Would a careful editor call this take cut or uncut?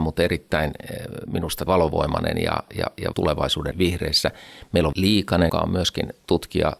cut